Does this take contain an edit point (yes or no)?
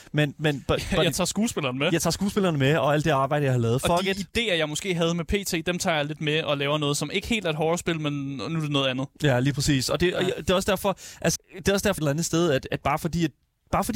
yes